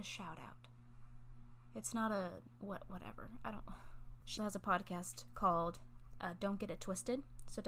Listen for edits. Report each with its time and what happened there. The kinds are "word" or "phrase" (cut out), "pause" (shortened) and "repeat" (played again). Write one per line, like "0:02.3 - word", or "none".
0:04.4 - word